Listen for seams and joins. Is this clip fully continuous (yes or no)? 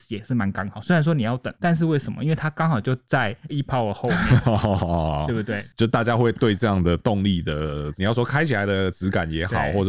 no